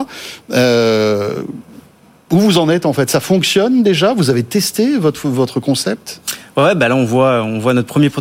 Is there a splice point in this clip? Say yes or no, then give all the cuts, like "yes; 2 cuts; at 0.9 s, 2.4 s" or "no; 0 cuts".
no; 0 cuts